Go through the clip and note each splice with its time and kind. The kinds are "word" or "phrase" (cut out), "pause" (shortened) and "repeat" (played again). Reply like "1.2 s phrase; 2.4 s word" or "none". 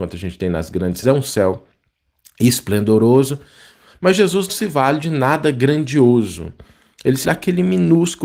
1.0 s word; 4.5 s word; 7.2 s word